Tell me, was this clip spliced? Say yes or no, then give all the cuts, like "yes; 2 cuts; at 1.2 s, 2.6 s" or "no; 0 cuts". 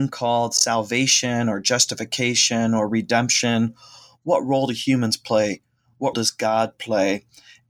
yes; 1 cut; at 6.1 s